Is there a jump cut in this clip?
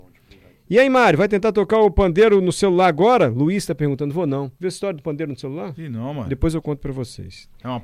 yes; 1 cut; at 4.5 s

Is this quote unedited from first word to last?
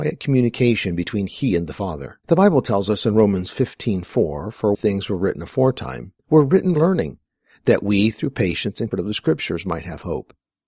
no; 5 cuts; at 2.2 s, 4.7 s, 6.2 s, 6.8 s, 8.9 s

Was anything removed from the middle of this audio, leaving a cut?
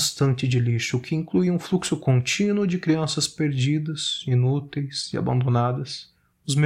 no; 0 cuts

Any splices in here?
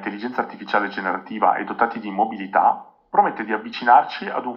no; 0 cuts

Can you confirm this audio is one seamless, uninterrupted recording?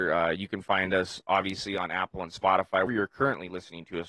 no; 1 cut; at 2.9 s

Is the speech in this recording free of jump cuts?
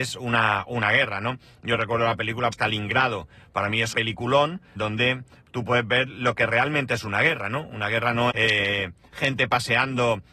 no; 4 cuts; at 2.5 s, 3.9 s, 4.8 s, 8.3 s

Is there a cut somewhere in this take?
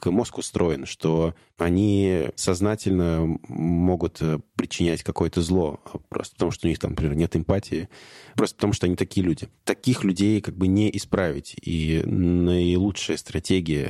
no; 0 cuts

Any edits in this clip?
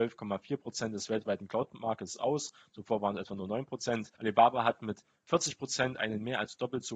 yes; 1 cut; at 4.2 s

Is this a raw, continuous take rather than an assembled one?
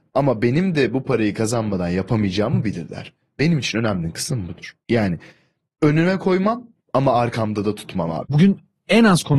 yes; 0 cuts

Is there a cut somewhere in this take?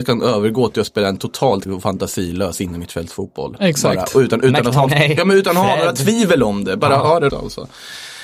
yes; 3 cuts; at 1.7 s, 4.9 s, 7.3 s

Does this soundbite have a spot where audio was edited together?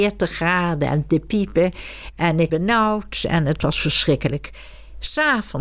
yes; 1 cut; at 2.5 s

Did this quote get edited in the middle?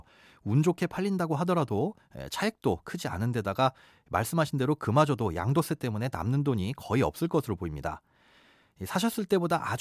no; 0 cuts

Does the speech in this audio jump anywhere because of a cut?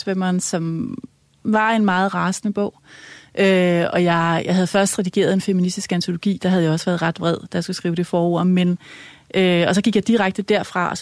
no; 0 cuts

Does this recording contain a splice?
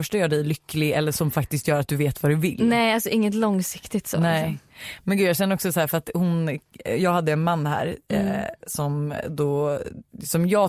no; 0 cuts

